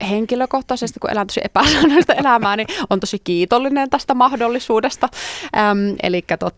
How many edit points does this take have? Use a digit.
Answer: 0